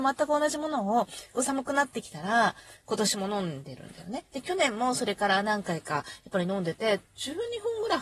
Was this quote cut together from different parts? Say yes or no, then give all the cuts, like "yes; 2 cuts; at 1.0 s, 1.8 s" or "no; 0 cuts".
no; 0 cuts